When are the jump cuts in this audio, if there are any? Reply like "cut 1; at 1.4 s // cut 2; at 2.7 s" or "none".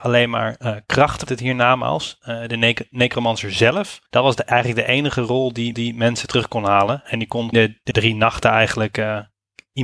cut 1; at 1.3 s // cut 2; at 4.1 s // cut 3; at 5.7 s // cut 4; at 7.5 s // cut 5; at 7.9 s